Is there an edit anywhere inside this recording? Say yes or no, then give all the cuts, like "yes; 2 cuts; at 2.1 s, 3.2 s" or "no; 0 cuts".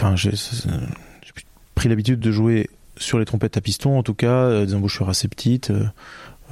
no; 0 cuts